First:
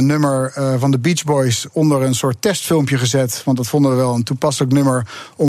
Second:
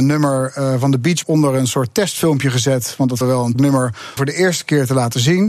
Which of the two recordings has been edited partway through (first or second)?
second